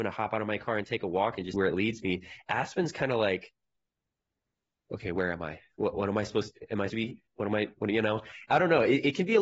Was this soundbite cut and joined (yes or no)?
yes